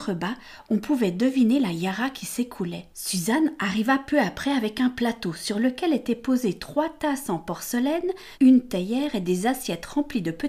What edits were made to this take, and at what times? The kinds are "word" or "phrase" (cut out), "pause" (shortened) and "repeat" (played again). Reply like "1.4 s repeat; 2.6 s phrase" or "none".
2.9 s pause; 8.3 s pause

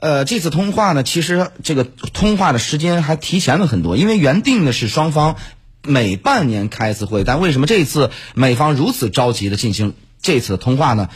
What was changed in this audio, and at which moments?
none

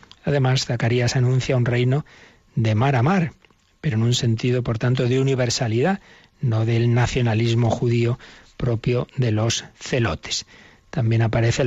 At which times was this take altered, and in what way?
none

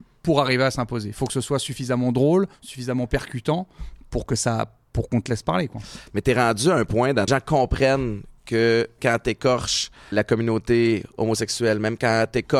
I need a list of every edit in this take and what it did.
2.5 s pause; 7.3 s phrase; 9.0 s word; 10.1 s word

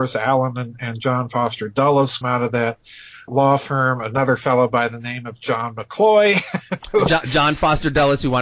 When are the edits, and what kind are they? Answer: 2.2 s word; 3.3 s word

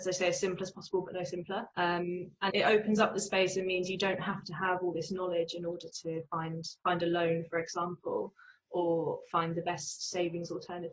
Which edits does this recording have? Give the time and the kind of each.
1.7 s pause; 2.5 s word

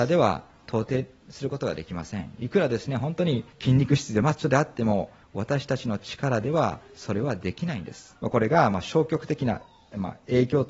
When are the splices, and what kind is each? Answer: 3.5 s pause; 8.2 s pause

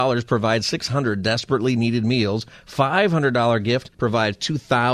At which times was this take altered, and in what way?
3.9 s pause

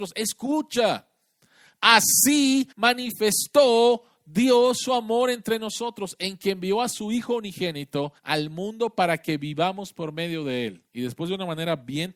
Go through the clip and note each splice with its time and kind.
2.7 s pause; 8.2 s pause; 10.9 s pause

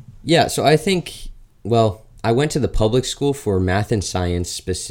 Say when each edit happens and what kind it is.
none

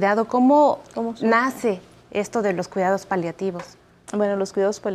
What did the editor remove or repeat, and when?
none

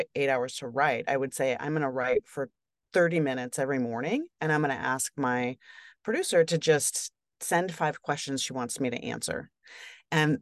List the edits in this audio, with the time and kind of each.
none

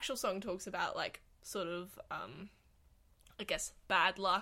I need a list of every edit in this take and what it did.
none

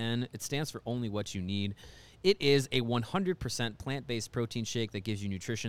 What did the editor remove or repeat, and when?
none

